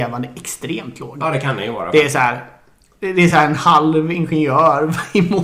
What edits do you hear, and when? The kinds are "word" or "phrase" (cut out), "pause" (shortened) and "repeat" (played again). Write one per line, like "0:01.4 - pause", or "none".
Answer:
none